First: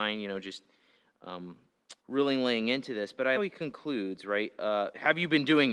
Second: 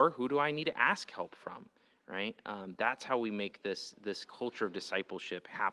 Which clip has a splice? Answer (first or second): first